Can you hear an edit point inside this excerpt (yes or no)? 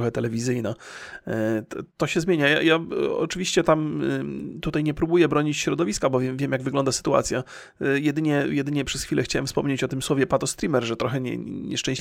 no